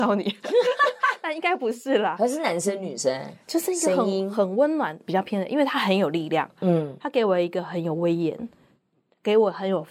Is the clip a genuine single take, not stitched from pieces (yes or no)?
no